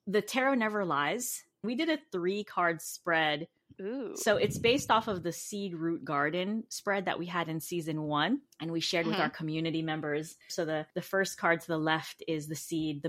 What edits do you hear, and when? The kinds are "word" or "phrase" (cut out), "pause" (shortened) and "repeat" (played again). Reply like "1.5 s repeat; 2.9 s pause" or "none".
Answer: 3.6 s pause; 8.5 s pause; 10.4 s pause; 10.9 s pause